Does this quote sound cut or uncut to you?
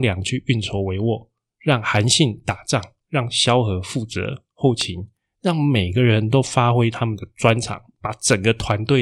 uncut